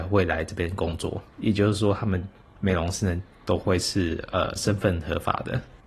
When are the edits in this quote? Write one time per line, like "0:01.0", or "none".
0:01.3